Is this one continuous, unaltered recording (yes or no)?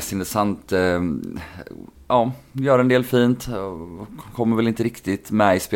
yes